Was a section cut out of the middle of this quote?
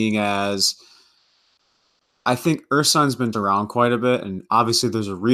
yes; 1 cut; at 3.3 s

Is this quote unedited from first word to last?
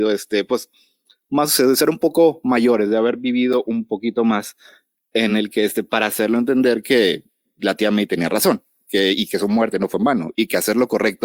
yes; 0 cuts

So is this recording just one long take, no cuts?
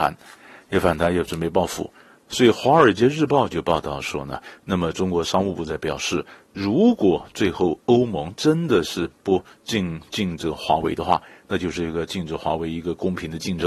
yes; 0 cuts

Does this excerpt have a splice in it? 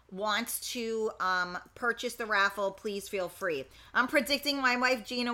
no; 0 cuts

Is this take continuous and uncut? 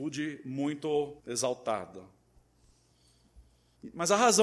no; 1 cut; at 1.2 s

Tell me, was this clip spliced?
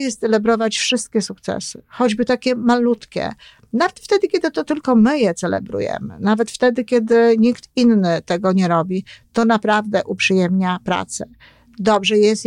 no; 0 cuts

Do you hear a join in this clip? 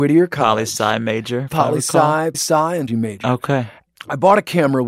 yes; 2 cuts; at 2.3 s, 2.9 s

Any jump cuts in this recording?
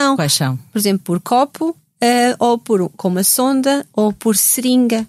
no; 0 cuts

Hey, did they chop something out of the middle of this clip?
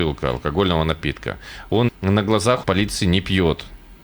yes; 2 cuts; at 1.9 s, 2.6 s

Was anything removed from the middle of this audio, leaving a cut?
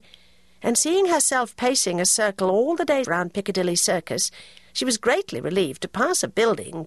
yes; 1 cut; at 3.0 s

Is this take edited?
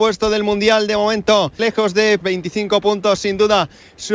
yes; 2 cuts; at 1.6 s, 2.2 s

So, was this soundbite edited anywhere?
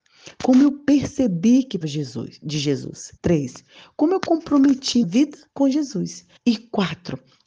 yes; 5 cuts; at 1.8 s, 3.2 s, 5.0 s, 5.5 s, 6.4 s

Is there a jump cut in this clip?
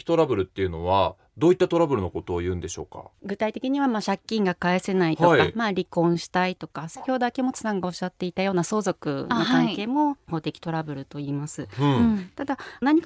yes; 1 cut; at 3.1 s

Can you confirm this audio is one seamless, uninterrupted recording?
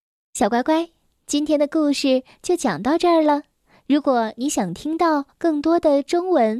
yes; 0 cuts

